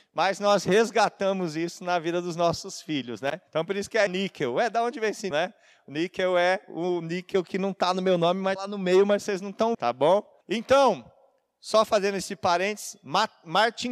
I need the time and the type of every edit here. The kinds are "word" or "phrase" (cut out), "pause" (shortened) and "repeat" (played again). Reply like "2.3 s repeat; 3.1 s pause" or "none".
3.5 s pause; 4.1 s word; 5.3 s word; 8.6 s word; 9.7 s word; 10.4 s pause